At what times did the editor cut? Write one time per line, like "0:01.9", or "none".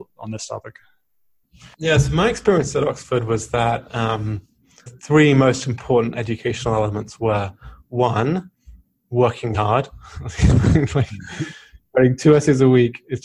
0:01.7
0:04.9
0:09.5

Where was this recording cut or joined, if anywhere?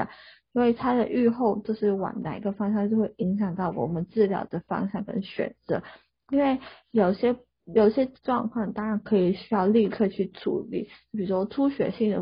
none

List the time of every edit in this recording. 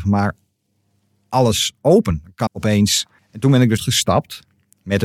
0:02.5
0:03.2
0:03.8

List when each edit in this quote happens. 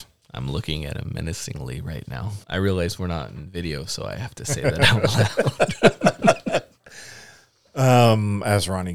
0:02.4

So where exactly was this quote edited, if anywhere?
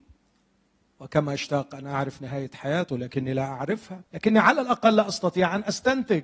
0:04.1

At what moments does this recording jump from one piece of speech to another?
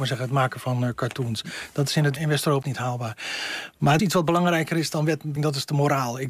0:02.2
0:02.6
0:04.0
0:05.4

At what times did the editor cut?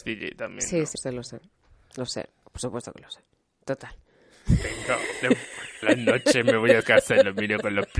0:01.0
0:05.8
0:06.8

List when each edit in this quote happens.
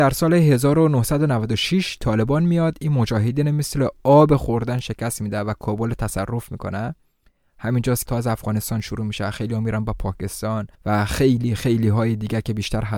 0:08.1
0:10.7

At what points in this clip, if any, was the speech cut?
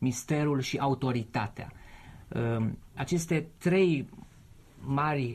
none

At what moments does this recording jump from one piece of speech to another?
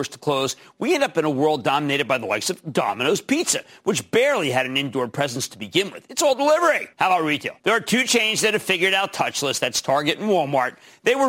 0:06.9
0:07.6

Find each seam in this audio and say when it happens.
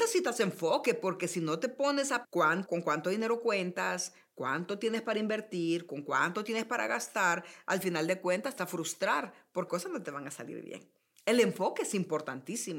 0:02.2
0:02.7
0:08.6
0:09.7

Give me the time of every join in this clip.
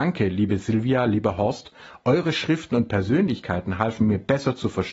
none

